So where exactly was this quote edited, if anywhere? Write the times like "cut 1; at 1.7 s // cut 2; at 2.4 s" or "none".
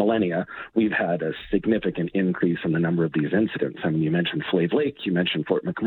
none